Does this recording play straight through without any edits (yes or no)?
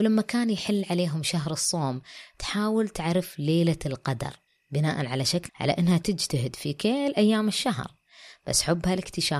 no